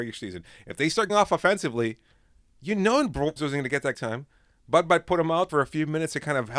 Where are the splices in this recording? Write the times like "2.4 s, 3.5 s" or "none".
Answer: 1.1 s, 3.4 s, 3.9 s, 5.5 s